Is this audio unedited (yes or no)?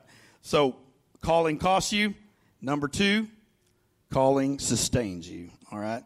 yes